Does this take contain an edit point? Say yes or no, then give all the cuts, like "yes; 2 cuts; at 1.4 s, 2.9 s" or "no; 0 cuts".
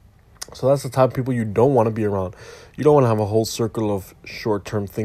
no; 0 cuts